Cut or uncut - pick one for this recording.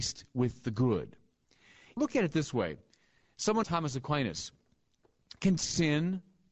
cut